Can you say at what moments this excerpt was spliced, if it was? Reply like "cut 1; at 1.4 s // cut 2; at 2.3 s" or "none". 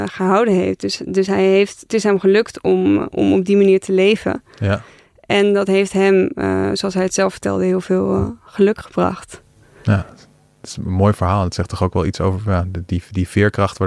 none